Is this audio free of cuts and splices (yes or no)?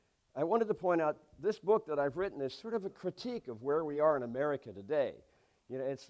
yes